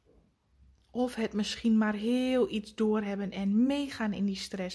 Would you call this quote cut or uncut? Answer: uncut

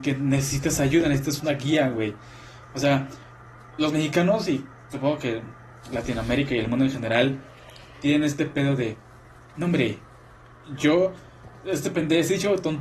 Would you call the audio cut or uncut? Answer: uncut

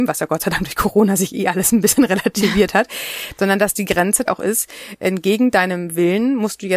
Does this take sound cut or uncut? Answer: cut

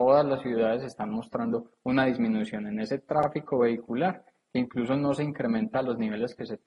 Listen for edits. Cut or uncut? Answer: uncut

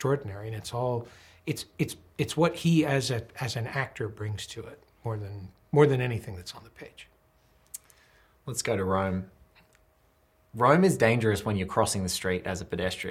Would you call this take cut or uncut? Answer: uncut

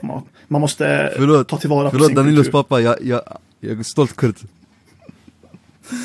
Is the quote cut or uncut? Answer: uncut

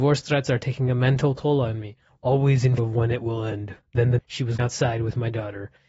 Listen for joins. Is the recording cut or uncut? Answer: cut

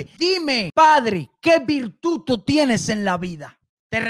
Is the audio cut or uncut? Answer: uncut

